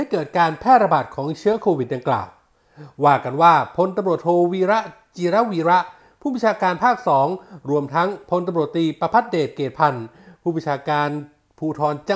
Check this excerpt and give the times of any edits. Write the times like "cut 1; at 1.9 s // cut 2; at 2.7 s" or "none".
none

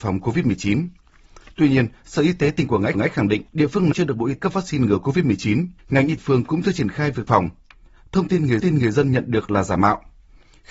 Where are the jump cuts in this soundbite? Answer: cut 1; at 2.9 s // cut 2; at 3.5 s // cut 3; at 3.9 s // cut 4; at 4.4 s // cut 5; at 5.8 s // cut 6; at 6.2 s // cut 7; at 7.3 s // cut 8; at 8.6 s

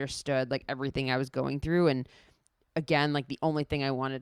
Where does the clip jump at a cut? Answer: none

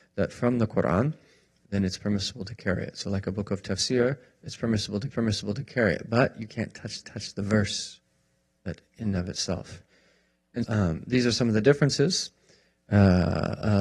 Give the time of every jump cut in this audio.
cut 1; at 5.1 s // cut 2; at 7.0 s // cut 3; at 10.6 s

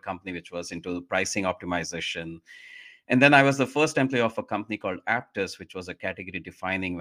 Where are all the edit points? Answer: none

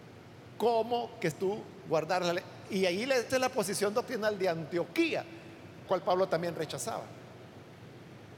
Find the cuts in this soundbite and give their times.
cut 1; at 1.3 s // cut 2; at 3.3 s // cut 3; at 5.9 s

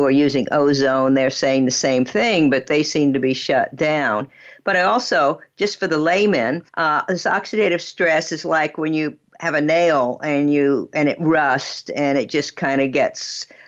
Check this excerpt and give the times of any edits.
cut 1; at 6.7 s

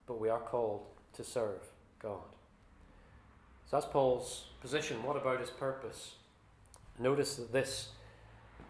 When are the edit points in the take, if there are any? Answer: none

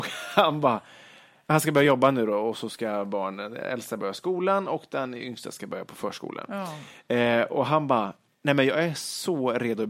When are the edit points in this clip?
none

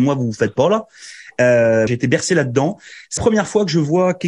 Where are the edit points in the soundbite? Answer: cut 1; at 1.9 s // cut 2; at 3.2 s

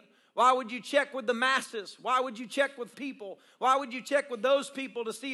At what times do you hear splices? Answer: cut 1; at 2.9 s

